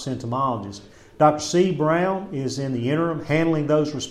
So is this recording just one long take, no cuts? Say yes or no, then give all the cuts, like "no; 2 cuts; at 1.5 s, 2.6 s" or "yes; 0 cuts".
yes; 0 cuts